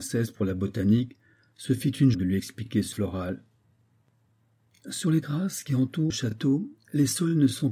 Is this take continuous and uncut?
no; 4 cuts; at 2.1 s, 2.9 s, 5.2 s, 6.1 s

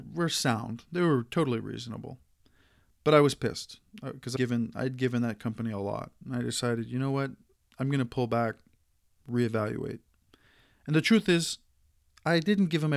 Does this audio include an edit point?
yes; 1 cut; at 4.4 s

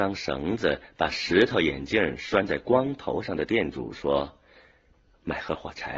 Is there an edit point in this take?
no; 0 cuts

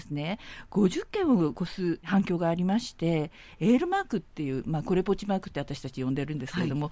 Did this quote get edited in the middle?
no; 0 cuts

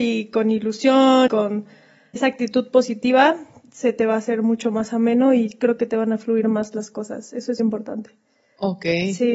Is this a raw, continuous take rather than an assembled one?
no; 3 cuts; at 1.3 s, 2.2 s, 7.6 s

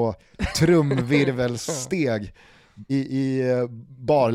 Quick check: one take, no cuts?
no; 1 cut; at 2.9 s

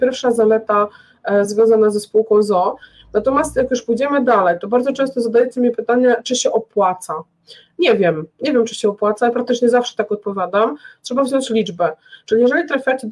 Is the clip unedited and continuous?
yes; 0 cuts

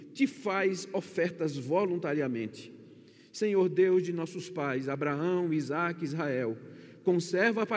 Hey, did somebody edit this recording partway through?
no; 0 cuts

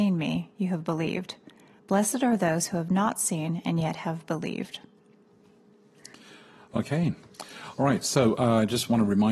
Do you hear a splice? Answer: no; 0 cuts

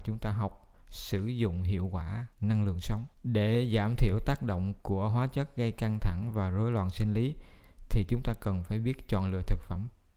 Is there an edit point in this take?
yes; 2 cuts; at 2.3 s, 3.1 s

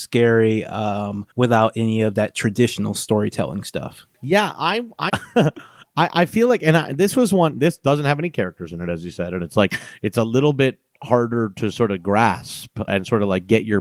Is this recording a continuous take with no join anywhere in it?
no; 3 cuts; at 1.3 s, 5.1 s, 12.9 s

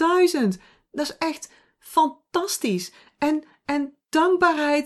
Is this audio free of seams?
yes; 0 cuts

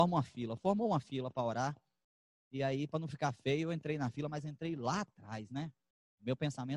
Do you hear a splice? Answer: no; 0 cuts

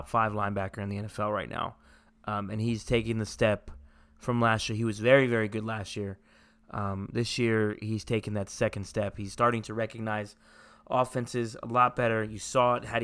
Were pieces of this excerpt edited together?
no; 0 cuts

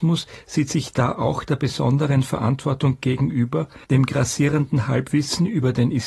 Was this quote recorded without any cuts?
no; 1 cut; at 3.8 s

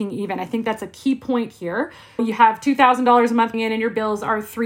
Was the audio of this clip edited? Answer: yes; 2 cuts; at 2.2 s, 3.5 s

